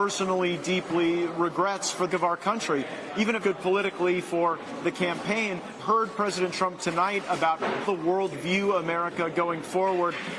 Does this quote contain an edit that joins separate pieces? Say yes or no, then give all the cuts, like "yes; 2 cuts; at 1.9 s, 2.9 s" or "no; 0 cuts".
yes; 6 cuts; at 2.1 s, 3.4 s, 5.8 s, 6.8 s, 7.8 s, 8.3 s